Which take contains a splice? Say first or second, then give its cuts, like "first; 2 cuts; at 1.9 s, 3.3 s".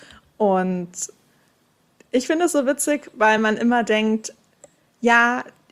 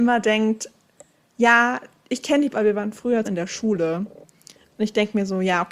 second; 2 cuts; at 2.5 s, 3.2 s